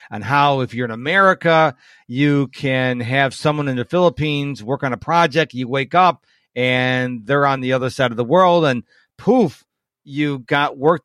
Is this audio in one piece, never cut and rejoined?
yes; 0 cuts

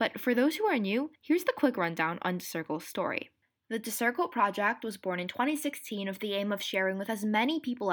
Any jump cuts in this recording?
yes; 2 cuts; at 1.2 s, 3.4 s

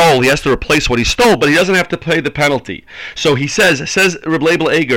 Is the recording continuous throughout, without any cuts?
yes; 0 cuts

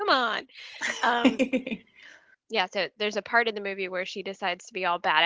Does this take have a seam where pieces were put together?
no; 0 cuts

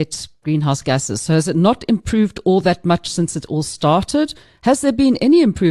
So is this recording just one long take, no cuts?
yes; 0 cuts

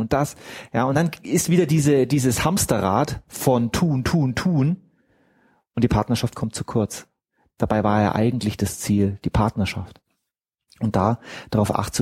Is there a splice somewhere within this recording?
no; 0 cuts

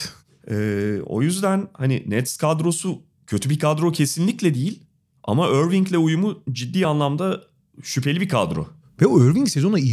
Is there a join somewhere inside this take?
no; 0 cuts

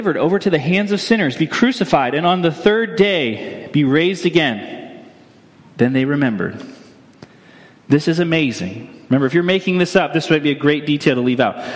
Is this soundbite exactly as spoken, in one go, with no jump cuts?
yes; 0 cuts

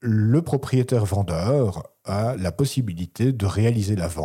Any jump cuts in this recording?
no; 0 cuts

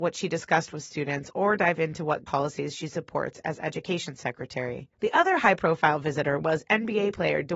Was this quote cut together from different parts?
yes; 2 cuts; at 2.3 s, 4.9 s

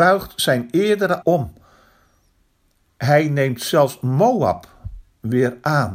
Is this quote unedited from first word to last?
no; 1 cut; at 1.2 s

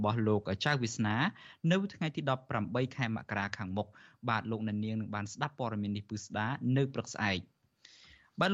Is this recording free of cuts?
yes; 0 cuts

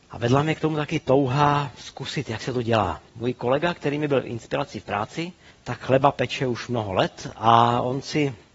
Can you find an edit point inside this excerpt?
yes; 2 cuts; at 3.1 s, 5.5 s

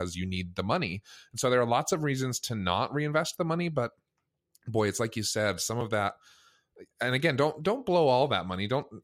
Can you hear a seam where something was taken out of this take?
no; 0 cuts

